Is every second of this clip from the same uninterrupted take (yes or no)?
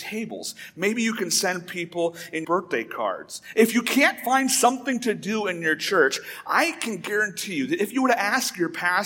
no